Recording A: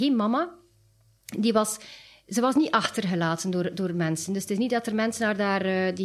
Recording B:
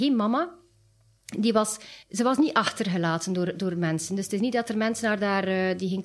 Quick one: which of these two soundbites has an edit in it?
B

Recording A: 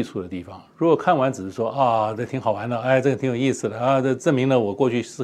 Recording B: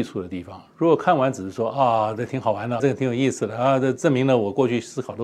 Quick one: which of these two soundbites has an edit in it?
B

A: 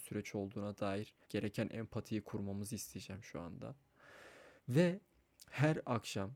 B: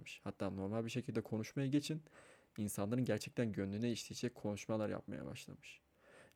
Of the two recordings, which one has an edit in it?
A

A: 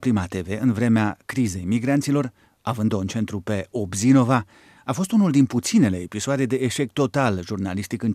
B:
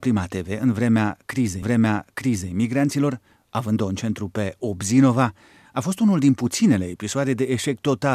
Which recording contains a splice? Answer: B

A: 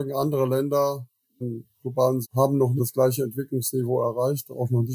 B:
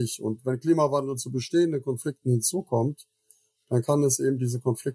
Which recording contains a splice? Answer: A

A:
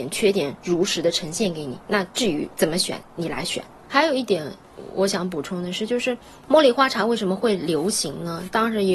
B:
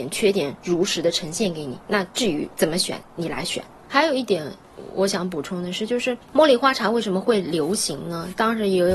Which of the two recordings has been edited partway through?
B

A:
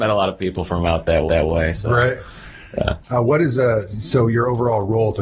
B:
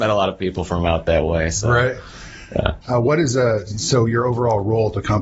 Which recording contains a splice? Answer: A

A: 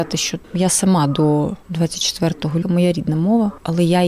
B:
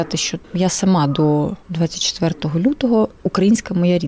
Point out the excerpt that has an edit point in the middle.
A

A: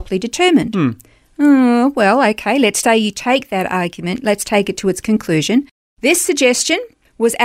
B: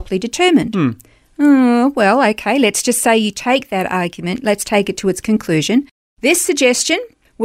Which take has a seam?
A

